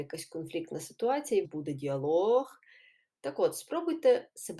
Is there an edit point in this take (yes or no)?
yes